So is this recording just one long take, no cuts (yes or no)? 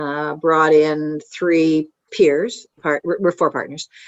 no